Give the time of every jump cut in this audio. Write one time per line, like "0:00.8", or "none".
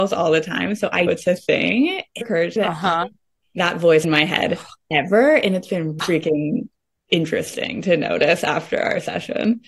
0:01.1
0:02.2
0:02.6
0:04.0
0:06.0